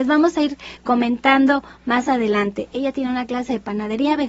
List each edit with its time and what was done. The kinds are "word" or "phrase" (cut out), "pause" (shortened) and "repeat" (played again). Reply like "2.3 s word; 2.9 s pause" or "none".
none